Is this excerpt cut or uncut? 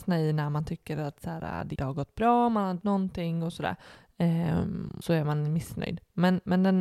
cut